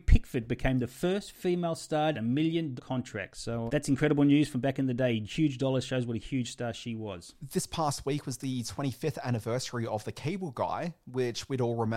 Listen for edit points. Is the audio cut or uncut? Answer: cut